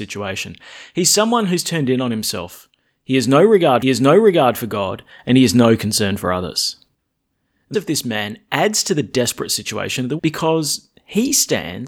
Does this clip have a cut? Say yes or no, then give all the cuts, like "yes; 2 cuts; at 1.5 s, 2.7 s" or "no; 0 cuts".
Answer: yes; 3 cuts; at 3.8 s, 7.7 s, 10.2 s